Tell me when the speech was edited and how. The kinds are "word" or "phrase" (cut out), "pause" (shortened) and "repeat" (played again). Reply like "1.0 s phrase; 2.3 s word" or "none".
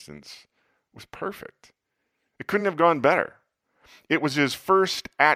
none